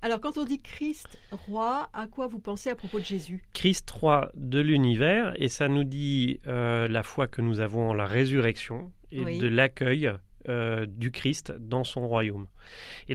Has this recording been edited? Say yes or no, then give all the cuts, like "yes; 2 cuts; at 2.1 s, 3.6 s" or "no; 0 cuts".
no; 0 cuts